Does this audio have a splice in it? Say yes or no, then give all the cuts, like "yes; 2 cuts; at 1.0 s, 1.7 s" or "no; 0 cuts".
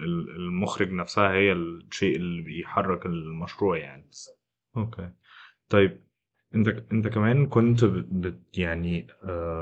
no; 0 cuts